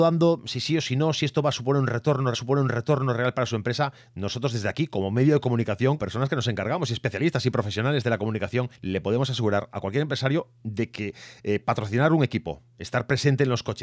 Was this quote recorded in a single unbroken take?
no; 3 cuts; at 2.3 s, 6.0 s, 8.7 s

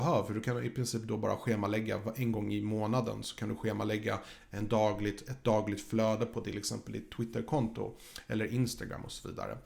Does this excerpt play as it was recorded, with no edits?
yes; 0 cuts

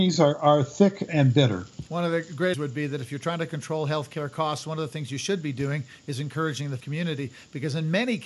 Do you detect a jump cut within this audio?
yes; 4 cuts; at 1.1 s, 1.9 s, 2.5 s, 6.8 s

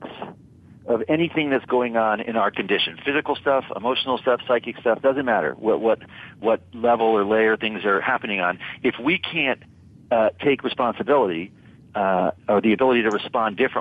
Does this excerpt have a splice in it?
no; 0 cuts

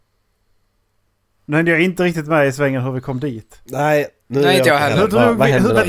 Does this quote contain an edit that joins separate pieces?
no; 0 cuts

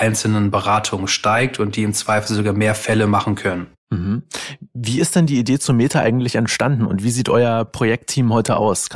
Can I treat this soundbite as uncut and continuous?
yes; 0 cuts

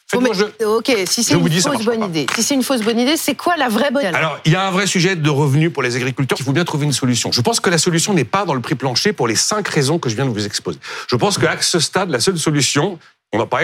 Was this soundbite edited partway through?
yes; 2 cuts; at 4.0 s, 6.4 s

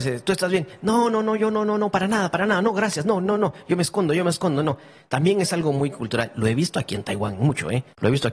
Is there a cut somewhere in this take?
no; 0 cuts

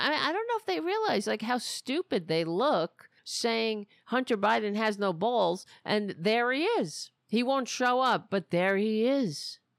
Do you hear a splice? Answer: yes; 2 cuts; at 3.2 s, 7.2 s

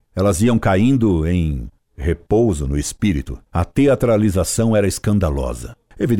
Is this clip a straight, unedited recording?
no; 1 cut; at 3.5 s

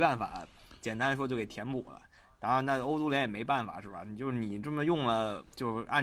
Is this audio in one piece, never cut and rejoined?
yes; 0 cuts

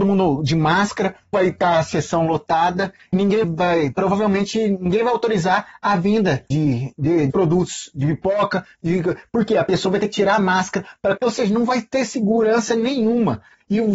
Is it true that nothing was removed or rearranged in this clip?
no; 6 cuts; at 1.3 s, 3.1 s, 3.4 s, 6.5 s, 7.3 s, 11.2 s

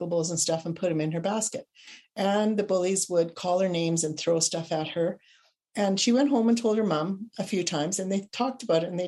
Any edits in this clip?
no; 0 cuts

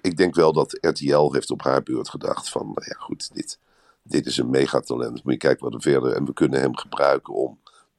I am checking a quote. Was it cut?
no; 0 cuts

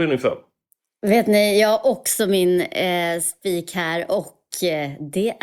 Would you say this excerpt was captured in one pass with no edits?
yes; 0 cuts

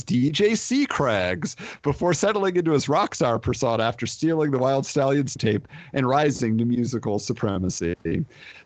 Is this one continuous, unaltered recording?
no; 1 cut; at 5.4 s

